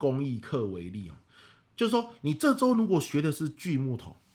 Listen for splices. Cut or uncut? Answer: uncut